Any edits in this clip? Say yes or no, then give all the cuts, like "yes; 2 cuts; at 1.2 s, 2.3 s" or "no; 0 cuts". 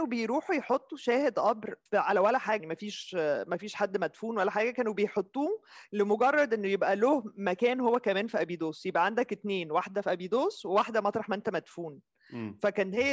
yes; 2 cuts; at 1.9 s, 2.6 s